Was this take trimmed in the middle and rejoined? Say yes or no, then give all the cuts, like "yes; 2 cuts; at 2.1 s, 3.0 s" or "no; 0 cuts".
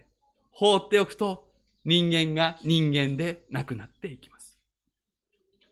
no; 0 cuts